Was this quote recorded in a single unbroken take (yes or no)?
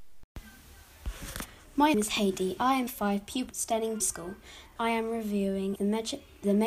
no